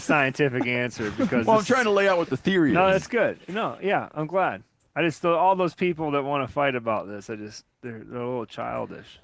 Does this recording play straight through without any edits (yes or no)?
yes